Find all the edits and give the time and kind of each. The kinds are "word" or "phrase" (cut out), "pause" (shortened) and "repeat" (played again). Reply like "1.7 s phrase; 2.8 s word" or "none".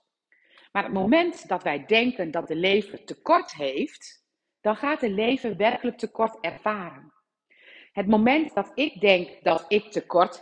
none